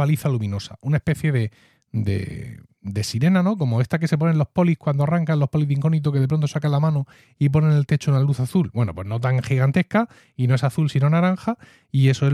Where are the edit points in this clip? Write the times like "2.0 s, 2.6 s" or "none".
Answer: none